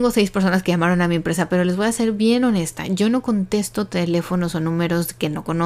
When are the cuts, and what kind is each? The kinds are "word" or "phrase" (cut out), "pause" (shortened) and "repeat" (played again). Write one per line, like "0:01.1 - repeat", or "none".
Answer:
none